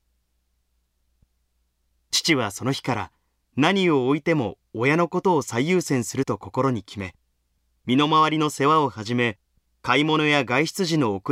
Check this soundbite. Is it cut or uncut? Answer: uncut